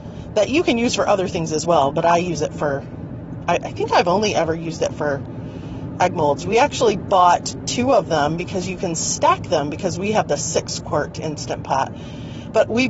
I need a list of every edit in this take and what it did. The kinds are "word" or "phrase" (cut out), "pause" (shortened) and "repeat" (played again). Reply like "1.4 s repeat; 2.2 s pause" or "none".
none